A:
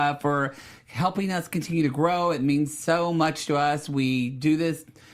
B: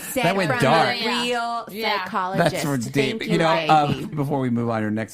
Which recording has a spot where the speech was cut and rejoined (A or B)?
B